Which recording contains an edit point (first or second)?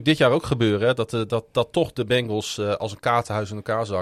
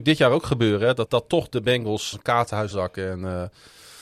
second